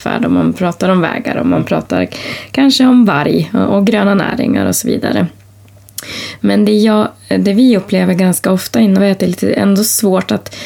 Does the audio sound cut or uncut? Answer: cut